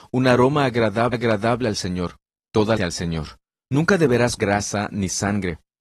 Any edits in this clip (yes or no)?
yes